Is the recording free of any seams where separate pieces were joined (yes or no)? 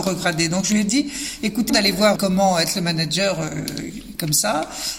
no